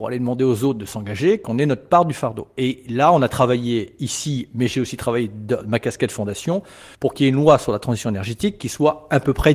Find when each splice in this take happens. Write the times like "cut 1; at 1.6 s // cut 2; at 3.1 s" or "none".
cut 1; at 6.9 s